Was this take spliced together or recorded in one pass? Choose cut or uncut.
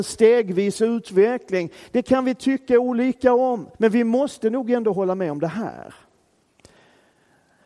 cut